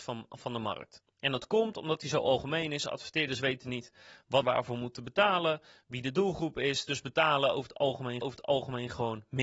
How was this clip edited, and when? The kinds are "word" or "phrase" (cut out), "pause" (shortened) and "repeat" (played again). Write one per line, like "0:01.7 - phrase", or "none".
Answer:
0:01.1 - pause
0:04.4 - word
0:08.2 - repeat

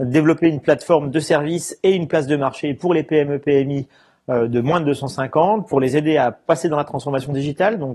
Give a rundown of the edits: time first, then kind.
none

